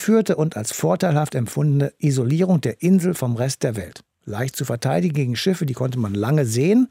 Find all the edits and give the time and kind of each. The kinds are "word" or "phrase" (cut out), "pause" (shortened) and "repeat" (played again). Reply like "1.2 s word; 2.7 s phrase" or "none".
none